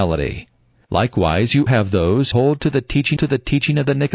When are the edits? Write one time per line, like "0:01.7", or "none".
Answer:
0:01.7
0:02.3
0:03.2

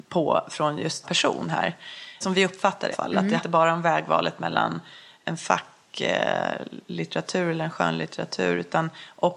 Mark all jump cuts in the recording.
0:01.0
0:02.2
0:02.9
0:03.4

